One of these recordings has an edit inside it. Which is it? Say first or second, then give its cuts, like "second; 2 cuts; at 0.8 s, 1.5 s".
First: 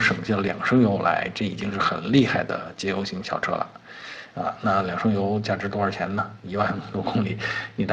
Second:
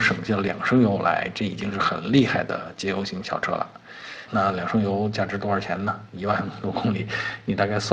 second; 1 cut; at 4.3 s